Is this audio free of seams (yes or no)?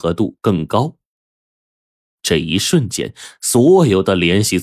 yes